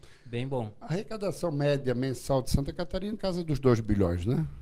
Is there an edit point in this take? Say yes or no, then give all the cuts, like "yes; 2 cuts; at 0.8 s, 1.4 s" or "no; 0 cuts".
yes; 1 cut; at 3.2 s